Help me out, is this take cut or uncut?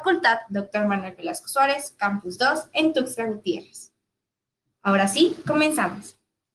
uncut